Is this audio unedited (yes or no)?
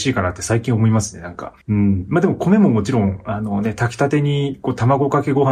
no